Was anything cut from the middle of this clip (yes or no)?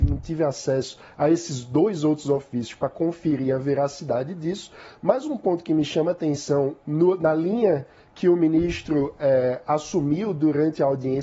no